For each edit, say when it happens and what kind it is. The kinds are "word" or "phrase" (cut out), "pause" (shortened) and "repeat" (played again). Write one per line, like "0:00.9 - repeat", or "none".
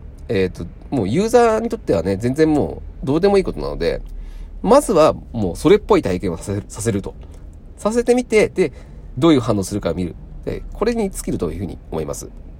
0:09.2 - phrase